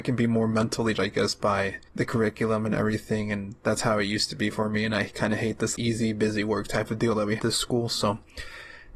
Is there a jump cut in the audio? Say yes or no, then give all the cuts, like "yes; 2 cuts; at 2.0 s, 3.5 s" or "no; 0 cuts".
yes; 4 cuts; at 0.9 s, 1.9 s, 5.7 s, 7.4 s